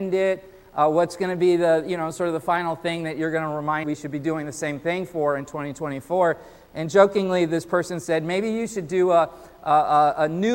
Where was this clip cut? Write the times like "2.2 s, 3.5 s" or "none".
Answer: 3.8 s